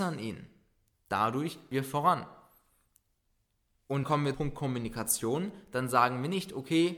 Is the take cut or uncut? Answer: cut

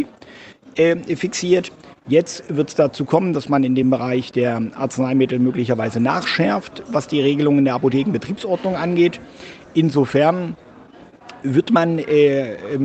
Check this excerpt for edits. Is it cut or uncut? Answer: uncut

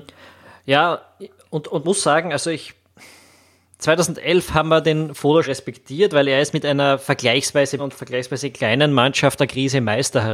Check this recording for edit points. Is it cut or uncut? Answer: cut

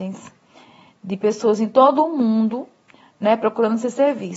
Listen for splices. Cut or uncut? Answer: uncut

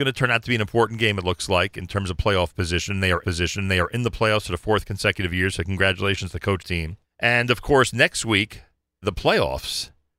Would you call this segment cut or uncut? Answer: cut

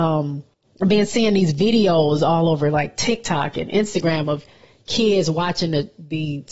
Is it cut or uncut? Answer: uncut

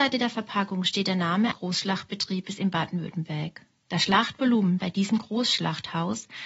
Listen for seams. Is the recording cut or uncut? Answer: cut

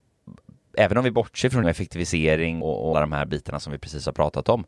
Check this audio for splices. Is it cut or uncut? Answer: cut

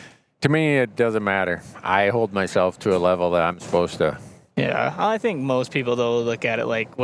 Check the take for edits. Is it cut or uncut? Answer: uncut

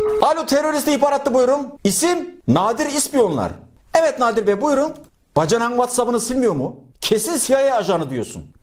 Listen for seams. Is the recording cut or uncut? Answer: uncut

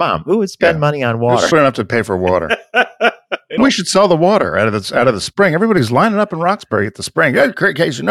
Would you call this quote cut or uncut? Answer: cut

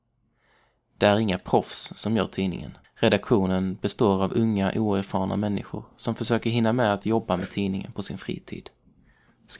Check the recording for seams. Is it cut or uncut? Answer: cut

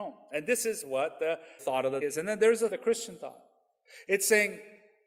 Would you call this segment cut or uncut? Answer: cut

